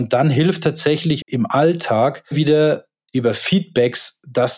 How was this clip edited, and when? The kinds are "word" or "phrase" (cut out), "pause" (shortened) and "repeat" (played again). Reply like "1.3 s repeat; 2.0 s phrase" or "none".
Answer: 1.2 s word; 2.3 s word